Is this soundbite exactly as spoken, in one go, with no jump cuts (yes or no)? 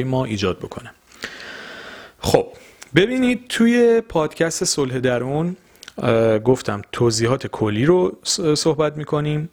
yes